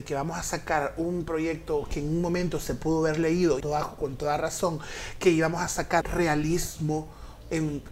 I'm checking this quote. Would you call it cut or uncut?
cut